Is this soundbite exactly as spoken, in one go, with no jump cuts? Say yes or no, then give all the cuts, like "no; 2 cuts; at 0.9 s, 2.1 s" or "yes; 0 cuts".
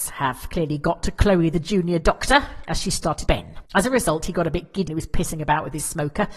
no; 3 cuts; at 3.3 s, 3.7 s, 4.9 s